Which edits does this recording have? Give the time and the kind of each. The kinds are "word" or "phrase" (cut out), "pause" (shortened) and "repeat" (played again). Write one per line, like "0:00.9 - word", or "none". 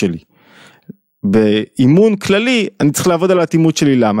none